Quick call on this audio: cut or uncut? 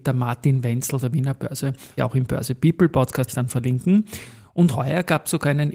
cut